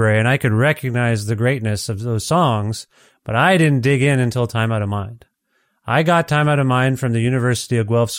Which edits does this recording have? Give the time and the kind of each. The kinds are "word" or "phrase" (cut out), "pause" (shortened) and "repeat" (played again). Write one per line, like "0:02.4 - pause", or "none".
none